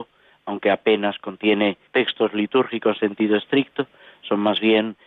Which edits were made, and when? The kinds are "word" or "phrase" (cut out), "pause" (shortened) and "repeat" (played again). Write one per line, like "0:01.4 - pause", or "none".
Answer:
0:01.9 - pause
0:03.0 - word